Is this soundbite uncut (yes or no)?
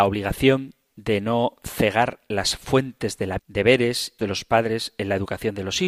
no